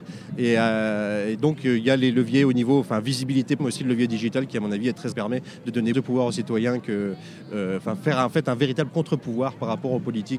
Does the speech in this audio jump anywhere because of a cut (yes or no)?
yes